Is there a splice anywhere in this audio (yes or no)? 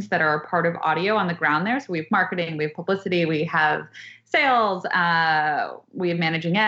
no